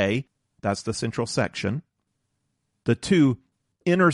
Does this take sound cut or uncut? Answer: uncut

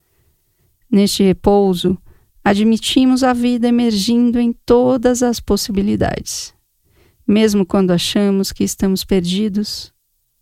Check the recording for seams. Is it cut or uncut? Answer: uncut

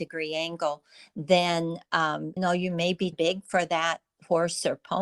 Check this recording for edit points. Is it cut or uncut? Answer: cut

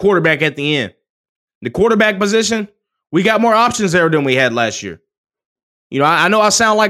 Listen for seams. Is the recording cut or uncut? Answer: uncut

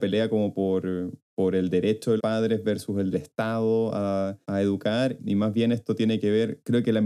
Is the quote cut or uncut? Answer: cut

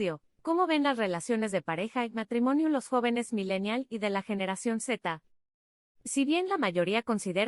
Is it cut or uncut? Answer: uncut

